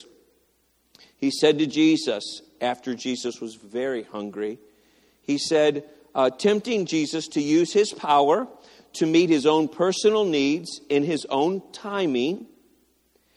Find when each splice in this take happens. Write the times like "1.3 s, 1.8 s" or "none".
none